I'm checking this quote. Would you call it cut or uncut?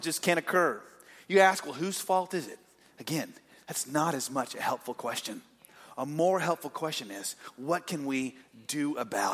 uncut